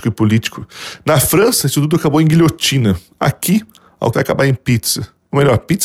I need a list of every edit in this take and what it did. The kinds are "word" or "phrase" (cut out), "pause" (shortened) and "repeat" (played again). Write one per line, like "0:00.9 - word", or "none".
0:04.1 - word

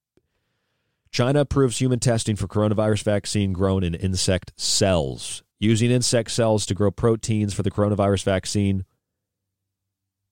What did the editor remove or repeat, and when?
0:05.5 - pause

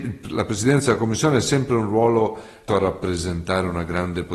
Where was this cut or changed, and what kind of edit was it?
0:02.7 - word

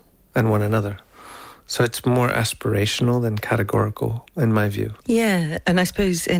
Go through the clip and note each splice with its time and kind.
0:05.0 - pause

